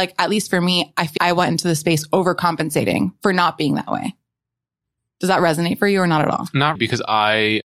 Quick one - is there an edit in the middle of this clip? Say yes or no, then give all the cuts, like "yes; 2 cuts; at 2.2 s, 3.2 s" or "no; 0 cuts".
yes; 2 cuts; at 1.2 s, 6.7 s